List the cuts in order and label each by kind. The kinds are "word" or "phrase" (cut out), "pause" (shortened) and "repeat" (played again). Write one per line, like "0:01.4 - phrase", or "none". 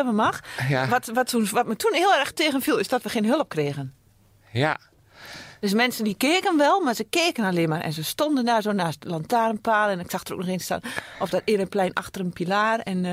none